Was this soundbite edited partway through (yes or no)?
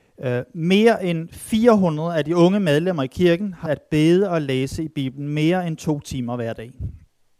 yes